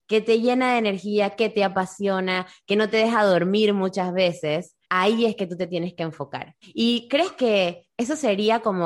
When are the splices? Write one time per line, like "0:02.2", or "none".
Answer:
0:04.8
0:06.6